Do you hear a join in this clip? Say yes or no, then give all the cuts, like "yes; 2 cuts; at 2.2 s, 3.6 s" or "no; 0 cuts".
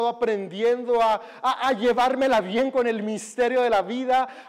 no; 0 cuts